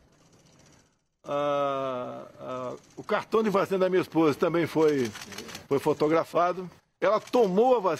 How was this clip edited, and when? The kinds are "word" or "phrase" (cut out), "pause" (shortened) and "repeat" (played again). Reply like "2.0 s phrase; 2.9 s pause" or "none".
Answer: 5.6 s pause; 6.8 s pause